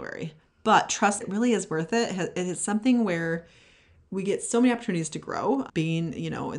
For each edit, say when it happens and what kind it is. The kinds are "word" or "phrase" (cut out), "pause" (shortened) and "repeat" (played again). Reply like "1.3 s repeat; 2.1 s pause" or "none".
1.2 s word; 5.7 s word